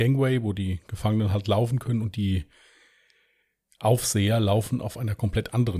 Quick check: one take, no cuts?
yes; 0 cuts

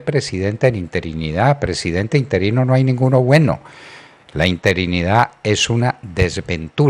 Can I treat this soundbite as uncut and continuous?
yes; 0 cuts

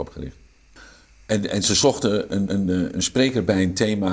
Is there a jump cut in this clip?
yes; 1 cut; at 2.5 s

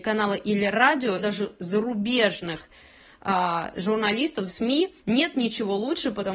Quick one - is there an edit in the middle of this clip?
yes; 4 cuts; at 1.2 s, 1.6 s, 4.5 s, 5.0 s

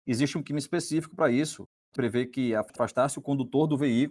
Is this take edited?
no; 0 cuts

